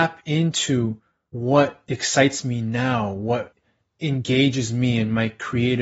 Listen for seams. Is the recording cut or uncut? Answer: uncut